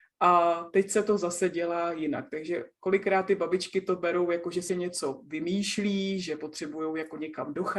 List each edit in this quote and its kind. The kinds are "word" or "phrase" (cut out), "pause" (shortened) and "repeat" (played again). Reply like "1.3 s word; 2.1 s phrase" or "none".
4.7 s word